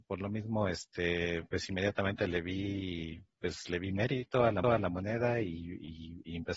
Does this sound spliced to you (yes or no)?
yes